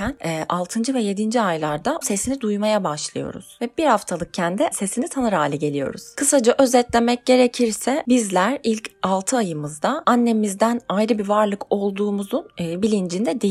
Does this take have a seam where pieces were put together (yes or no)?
yes